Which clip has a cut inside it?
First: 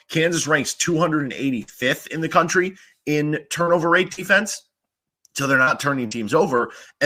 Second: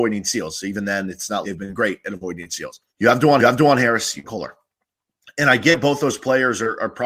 second; 4 cuts; at 1.4 s, 2.9 s, 3.4 s, 4.2 s

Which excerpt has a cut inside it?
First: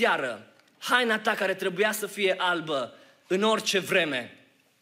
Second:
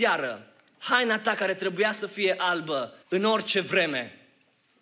second; 1 cut; at 3.0 s

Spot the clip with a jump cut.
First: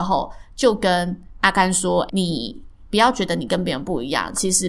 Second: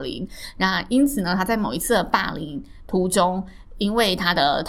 first; 1 cut; at 2.1 s

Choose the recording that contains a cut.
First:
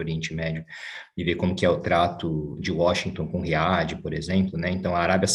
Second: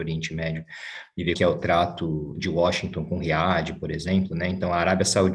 second; 1 cut; at 1.3 s

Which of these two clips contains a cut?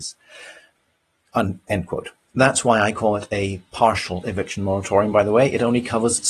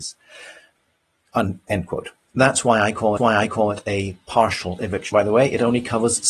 second; 2 cuts; at 3.2 s, 5.1 s

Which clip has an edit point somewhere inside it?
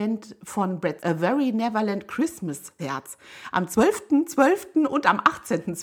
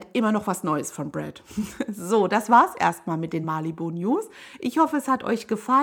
first; 2 cuts; at 1.0 s, 2.8 s

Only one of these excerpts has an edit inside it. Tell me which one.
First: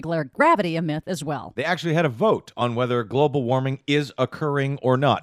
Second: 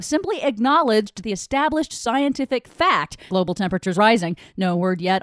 second; 2 cuts; at 3.3 s, 3.9 s

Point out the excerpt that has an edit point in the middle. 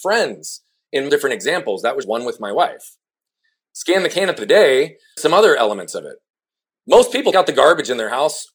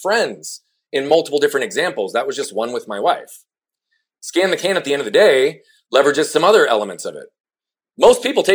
first; 5 cuts; at 1.1 s, 2.0 s, 4.4 s, 5.2 s, 7.3 s

